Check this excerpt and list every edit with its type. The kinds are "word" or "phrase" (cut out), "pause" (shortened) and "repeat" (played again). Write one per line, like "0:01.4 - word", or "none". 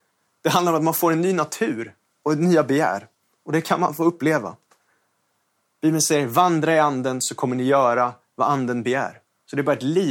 none